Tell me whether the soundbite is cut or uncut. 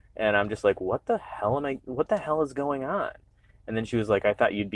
uncut